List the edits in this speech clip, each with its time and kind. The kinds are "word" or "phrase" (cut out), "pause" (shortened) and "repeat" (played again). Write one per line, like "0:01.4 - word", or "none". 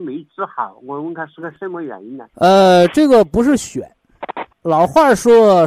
0:02.3 - pause
0:04.5 - pause